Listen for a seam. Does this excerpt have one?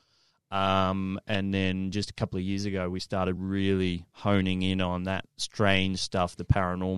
no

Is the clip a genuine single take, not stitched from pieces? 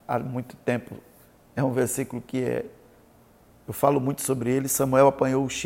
yes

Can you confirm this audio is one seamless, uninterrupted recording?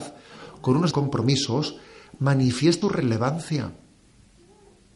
no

